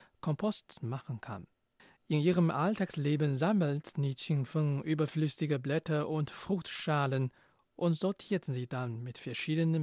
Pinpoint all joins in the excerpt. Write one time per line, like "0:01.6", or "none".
0:01.8